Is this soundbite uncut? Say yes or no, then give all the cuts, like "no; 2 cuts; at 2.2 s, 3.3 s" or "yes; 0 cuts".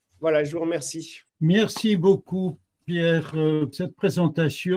no; 2 cuts; at 1.3 s, 3.7 s